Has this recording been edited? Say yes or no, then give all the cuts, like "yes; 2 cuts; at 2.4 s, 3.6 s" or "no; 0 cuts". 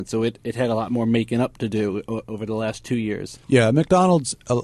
yes; 1 cut; at 3.4 s